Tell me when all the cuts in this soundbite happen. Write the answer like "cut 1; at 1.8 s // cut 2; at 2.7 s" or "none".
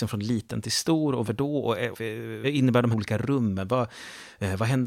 cut 1; at 1.3 s // cut 2; at 1.9 s // cut 3; at 2.4 s // cut 4; at 2.9 s